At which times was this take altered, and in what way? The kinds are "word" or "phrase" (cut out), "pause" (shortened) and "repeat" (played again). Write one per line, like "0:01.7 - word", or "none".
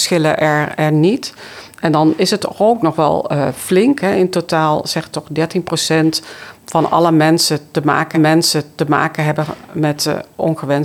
0:08.1 - repeat